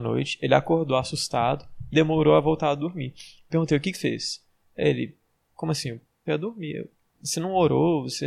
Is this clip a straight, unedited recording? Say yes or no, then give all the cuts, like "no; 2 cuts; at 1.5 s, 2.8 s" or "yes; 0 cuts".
no; 4 cuts; at 1.9 s, 3.5 s, 3.9 s, 6.3 s